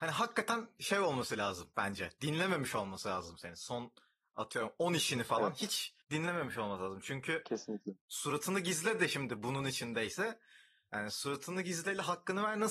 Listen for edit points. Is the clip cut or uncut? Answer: cut